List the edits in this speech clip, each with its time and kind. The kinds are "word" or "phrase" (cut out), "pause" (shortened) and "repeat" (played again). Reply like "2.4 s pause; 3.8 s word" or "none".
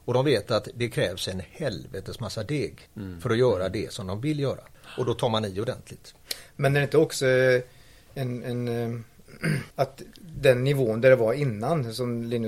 2.9 s pause; 9.7 s pause